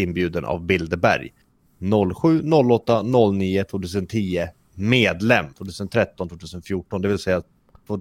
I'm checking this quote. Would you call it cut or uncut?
cut